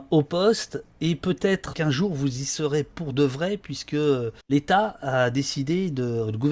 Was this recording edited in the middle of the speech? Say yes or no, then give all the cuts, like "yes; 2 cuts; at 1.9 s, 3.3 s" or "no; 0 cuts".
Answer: yes; 2 cuts; at 1.7 s, 4.4 s